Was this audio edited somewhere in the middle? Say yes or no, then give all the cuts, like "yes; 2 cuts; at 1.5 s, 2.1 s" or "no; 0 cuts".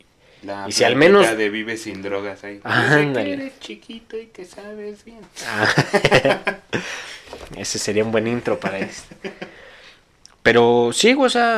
no; 0 cuts